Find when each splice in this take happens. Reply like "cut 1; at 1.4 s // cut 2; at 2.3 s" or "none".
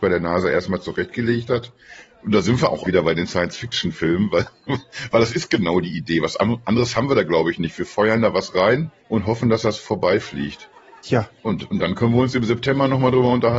cut 1; at 2.8 s // cut 2; at 9.0 s // cut 3; at 11.4 s